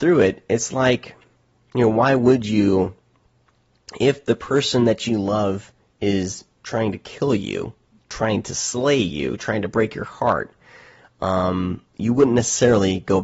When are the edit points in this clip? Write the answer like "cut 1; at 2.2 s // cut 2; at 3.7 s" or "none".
cut 1; at 11.9 s